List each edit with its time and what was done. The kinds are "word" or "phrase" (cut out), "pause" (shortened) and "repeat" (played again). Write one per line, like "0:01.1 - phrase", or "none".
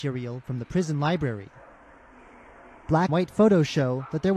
0:03.1 - word